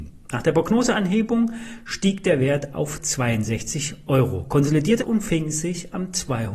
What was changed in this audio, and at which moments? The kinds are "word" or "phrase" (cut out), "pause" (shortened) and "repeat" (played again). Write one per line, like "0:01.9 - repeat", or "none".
0:05.0 - word